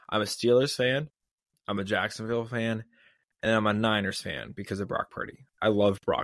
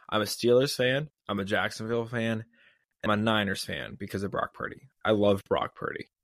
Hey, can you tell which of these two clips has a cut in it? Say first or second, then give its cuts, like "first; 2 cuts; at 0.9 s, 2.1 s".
second; 2 cuts; at 1.2 s, 3.1 s